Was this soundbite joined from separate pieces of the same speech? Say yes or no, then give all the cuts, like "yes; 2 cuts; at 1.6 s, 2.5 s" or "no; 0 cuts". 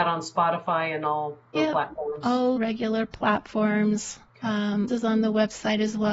yes; 4 cuts; at 1.5 s, 2.6 s, 4.3 s, 4.9 s